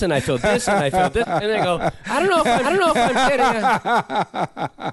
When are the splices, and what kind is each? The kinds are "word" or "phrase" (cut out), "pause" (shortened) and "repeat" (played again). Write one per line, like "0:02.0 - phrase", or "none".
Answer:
0:01.2 - word
0:02.6 - repeat